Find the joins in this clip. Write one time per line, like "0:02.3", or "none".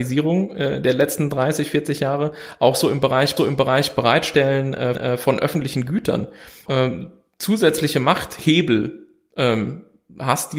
0:03.4
0:04.9
0:06.7